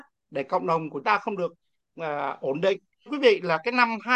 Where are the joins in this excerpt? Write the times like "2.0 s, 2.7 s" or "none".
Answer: 1.0 s, 3.1 s